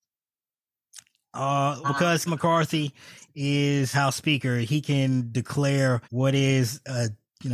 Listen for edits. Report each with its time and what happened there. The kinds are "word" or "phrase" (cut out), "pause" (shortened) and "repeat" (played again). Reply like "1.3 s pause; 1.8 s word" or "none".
1.8 s word; 2.3 s word; 3.9 s word; 6.0 s pause